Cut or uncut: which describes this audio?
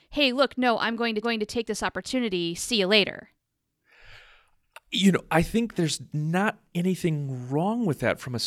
cut